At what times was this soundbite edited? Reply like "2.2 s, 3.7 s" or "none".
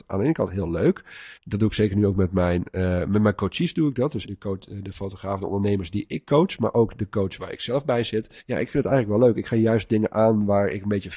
1.4 s, 4.2 s, 8.4 s